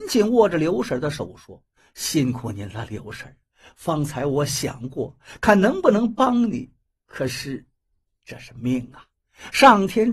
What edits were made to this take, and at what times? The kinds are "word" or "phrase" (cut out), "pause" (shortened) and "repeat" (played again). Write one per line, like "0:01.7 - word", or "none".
0:08.1 - word